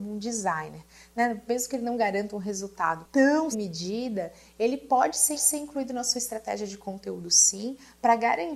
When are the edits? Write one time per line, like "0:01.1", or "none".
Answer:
0:03.5
0:05.3